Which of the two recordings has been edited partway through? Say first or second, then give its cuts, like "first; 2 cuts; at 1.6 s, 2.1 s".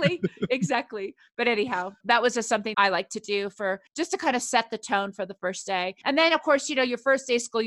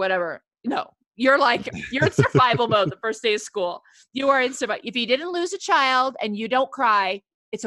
first; 4 cuts; at 2.0 s, 2.7 s, 3.9 s, 6.0 s